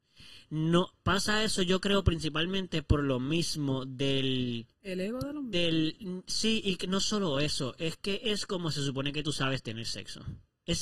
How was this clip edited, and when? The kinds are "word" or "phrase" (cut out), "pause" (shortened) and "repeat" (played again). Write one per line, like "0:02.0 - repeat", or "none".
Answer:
0:04.7 - pause